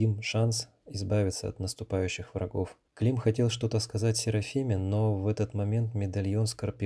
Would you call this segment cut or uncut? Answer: cut